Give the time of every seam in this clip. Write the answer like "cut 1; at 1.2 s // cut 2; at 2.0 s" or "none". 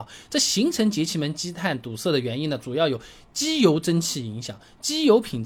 none

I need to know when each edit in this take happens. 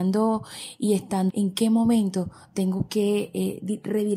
cut 1; at 1.3 s

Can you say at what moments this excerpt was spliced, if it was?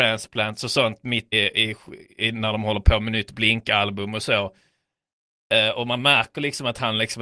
cut 1; at 1.3 s

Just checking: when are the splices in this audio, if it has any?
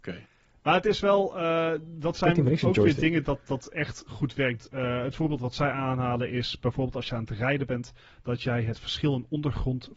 none

